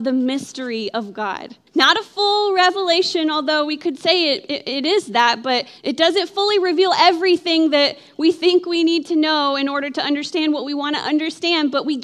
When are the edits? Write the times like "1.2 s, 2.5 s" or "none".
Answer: 1.7 s, 5.8 s